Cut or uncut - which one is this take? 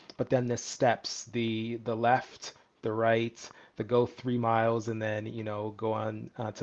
uncut